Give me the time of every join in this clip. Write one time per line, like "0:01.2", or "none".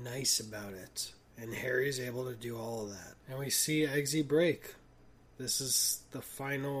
0:03.2